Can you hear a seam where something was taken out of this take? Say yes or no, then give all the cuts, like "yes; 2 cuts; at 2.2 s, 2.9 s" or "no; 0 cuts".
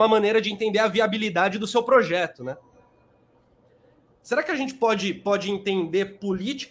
no; 0 cuts